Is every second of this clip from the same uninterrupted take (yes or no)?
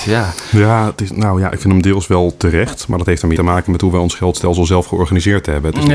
no